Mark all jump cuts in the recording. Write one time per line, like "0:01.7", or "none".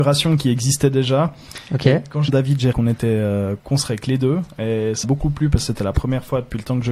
0:02.3
0:02.7
0:03.6
0:05.0